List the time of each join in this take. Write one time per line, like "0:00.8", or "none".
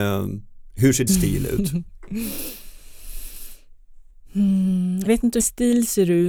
0:01.1
0:05.1
0:05.4